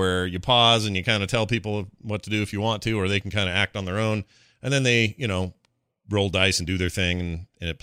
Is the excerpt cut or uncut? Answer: uncut